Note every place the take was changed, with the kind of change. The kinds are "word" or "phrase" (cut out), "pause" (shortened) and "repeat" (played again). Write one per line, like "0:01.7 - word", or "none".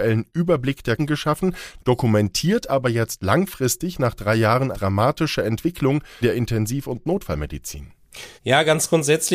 0:01.0 - word
0:04.7 - word
0:06.2 - word
0:08.4 - pause